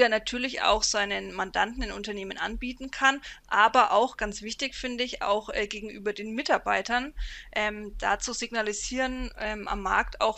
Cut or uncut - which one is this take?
uncut